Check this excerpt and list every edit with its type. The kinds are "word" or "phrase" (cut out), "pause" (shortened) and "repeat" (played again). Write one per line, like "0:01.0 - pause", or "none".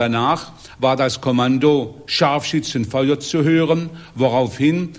none